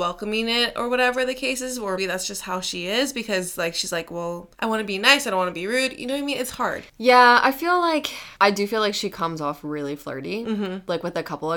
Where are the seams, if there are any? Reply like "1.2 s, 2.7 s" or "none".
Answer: 2.0 s, 4.5 s, 6.9 s, 8.4 s